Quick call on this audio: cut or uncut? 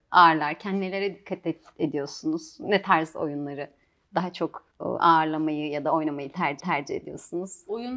cut